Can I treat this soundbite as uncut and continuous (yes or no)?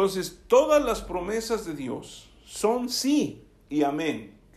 yes